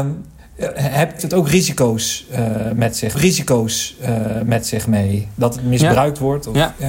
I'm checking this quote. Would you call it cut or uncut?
cut